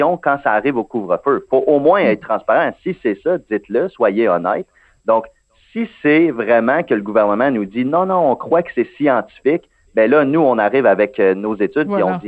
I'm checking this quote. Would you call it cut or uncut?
uncut